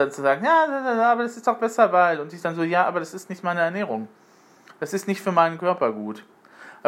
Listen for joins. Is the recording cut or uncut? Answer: uncut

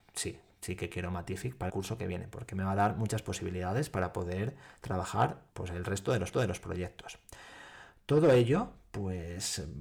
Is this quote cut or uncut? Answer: cut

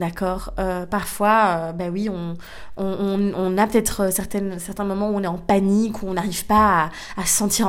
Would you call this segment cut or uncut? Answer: uncut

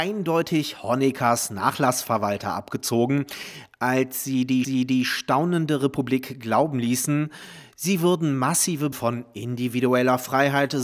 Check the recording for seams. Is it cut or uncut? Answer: cut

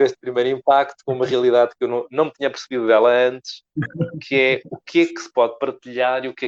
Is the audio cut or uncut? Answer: uncut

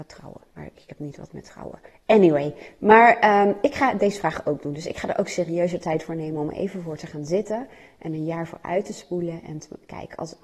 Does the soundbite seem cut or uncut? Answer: uncut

